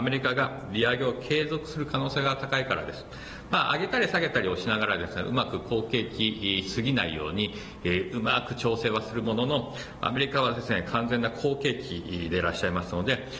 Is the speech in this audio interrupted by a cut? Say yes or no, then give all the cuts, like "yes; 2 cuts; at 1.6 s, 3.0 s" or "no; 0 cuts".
no; 0 cuts